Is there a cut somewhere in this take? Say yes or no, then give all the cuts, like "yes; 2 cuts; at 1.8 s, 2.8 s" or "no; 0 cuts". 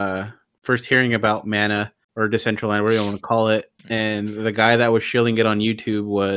yes; 2 cuts; at 2.0 s, 3.8 s